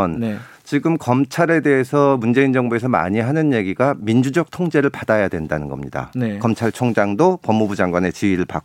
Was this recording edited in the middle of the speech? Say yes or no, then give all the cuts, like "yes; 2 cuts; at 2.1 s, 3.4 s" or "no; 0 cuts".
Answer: no; 0 cuts